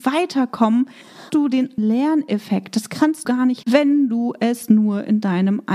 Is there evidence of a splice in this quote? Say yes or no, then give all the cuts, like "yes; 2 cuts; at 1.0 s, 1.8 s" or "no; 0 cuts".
yes; 4 cuts; at 1.3 s, 1.8 s, 3.2 s, 3.6 s